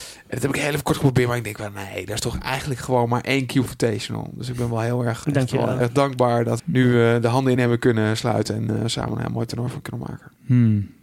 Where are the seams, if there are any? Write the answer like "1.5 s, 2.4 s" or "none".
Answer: 5.2 s, 5.8 s, 6.6 s, 7.6 s